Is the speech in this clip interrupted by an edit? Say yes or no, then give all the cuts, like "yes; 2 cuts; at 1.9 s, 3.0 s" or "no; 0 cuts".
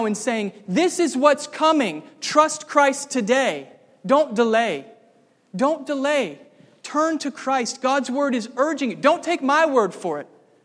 no; 0 cuts